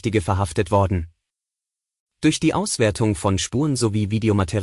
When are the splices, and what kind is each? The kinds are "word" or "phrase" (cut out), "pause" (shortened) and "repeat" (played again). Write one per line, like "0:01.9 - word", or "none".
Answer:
none